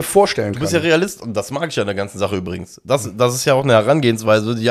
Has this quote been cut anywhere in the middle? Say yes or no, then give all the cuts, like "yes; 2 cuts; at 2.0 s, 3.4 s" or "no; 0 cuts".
no; 0 cuts